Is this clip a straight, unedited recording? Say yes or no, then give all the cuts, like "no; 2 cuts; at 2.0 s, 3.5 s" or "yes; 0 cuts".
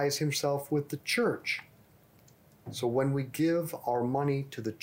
yes; 0 cuts